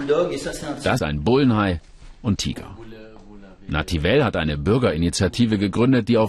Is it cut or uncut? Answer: cut